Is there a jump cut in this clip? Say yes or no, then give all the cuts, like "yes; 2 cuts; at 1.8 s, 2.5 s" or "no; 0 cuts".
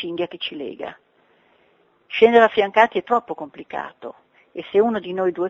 no; 0 cuts